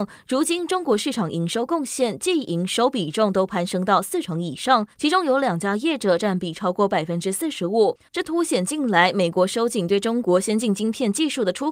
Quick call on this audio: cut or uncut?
cut